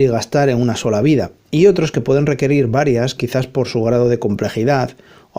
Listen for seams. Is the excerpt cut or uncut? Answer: cut